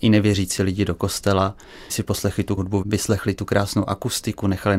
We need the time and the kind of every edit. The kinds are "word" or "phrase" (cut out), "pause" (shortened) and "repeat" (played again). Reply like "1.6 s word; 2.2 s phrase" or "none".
1.9 s word; 2.6 s word